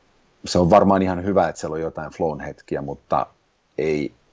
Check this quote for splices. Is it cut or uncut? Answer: uncut